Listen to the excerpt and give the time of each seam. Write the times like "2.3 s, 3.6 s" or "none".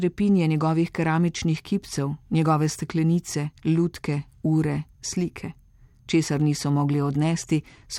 none